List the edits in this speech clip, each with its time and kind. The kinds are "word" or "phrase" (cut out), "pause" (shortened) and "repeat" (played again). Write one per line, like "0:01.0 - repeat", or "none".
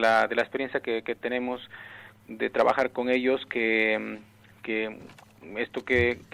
none